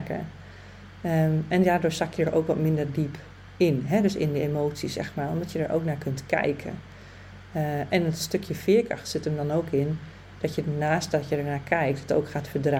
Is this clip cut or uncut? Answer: uncut